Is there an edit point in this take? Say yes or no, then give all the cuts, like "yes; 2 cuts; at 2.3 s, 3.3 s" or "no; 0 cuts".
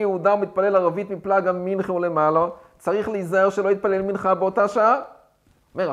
no; 0 cuts